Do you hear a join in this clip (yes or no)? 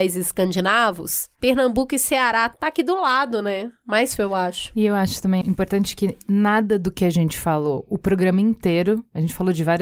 yes